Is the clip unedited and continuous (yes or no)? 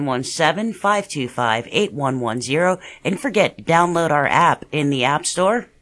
no